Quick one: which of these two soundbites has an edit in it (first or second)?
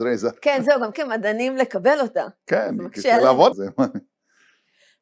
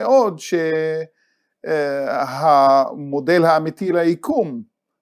first